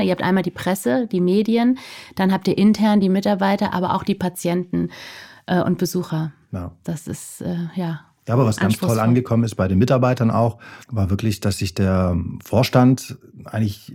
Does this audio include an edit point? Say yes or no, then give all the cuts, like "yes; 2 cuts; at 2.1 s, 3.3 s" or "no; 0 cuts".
yes; 1 cut; at 10.8 s